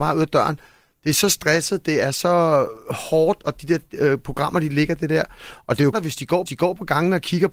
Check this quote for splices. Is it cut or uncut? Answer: cut